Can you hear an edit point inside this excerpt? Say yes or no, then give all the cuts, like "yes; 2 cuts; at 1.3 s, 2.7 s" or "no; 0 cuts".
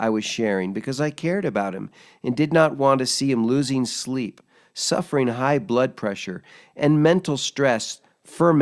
no; 0 cuts